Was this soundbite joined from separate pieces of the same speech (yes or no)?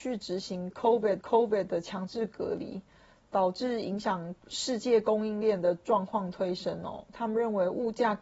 yes